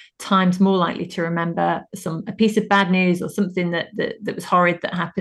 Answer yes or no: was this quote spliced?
no